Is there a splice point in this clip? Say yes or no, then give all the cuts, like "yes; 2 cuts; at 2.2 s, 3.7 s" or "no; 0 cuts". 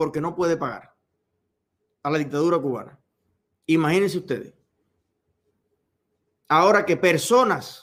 no; 0 cuts